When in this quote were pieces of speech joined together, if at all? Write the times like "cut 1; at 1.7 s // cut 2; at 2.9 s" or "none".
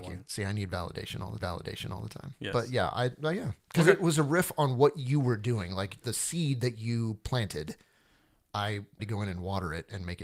cut 1; at 1.4 s // cut 2; at 3.6 s // cut 3; at 6.0 s // cut 4; at 9.0 s